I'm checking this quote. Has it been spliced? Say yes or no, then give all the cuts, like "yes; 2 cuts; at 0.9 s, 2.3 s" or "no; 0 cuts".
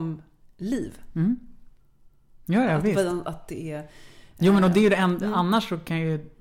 no; 0 cuts